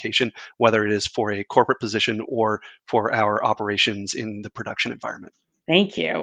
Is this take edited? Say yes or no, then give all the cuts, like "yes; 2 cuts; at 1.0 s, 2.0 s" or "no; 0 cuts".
no; 0 cuts